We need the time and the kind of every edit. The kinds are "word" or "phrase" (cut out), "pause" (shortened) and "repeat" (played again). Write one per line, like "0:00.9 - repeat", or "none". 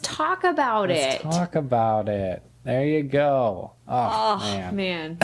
0:03.8 - pause

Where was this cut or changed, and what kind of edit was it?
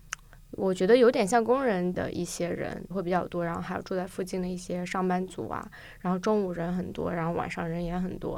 0:02.9 - word

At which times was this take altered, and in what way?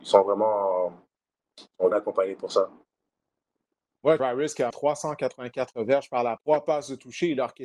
0:01.9 - word
0:04.2 - word
0:04.7 - word
0:06.4 - word

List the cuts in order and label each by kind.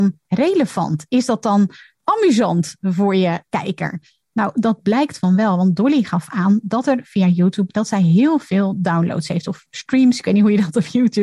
none

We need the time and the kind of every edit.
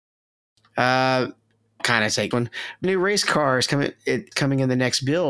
0:01.8 - word
0:02.3 - word
0:02.8 - word
0:04.3 - word

